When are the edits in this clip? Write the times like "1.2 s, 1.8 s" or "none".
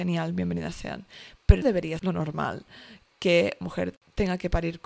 1.6 s, 2.0 s, 3.6 s

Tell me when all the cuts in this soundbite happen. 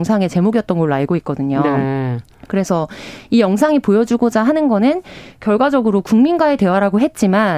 none

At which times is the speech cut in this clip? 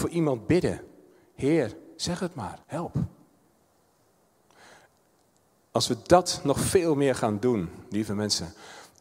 2.6 s

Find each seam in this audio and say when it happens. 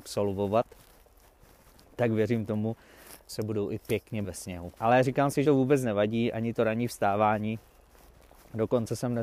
3.3 s, 4.2 s, 4.8 s, 5.4 s

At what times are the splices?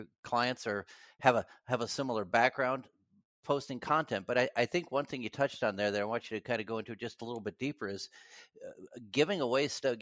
none

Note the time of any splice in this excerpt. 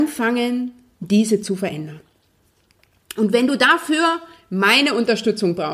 none

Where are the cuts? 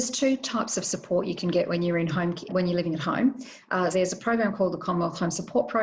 2.5 s, 3.9 s

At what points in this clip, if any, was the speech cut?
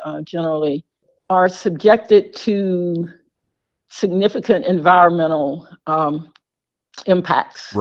none

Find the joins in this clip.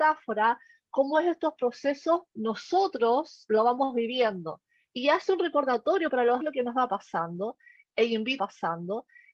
2.3 s, 6.4 s, 8.4 s

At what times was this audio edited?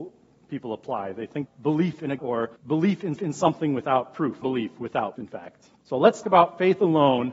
1.5 s, 2.2 s, 2.6 s, 3.1 s, 4.4 s, 5.2 s, 5.8 s, 6.2 s

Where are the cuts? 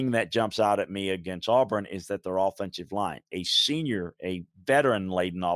none

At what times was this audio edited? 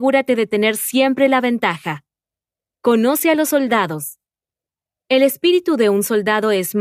none

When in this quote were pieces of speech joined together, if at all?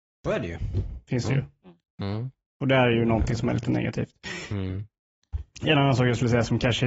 none

